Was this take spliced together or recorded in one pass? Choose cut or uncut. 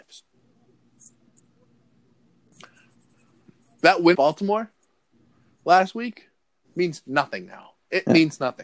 cut